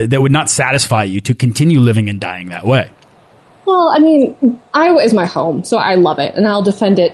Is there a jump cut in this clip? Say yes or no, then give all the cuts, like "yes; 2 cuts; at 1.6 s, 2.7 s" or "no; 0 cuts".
yes; 1 cut; at 4.7 s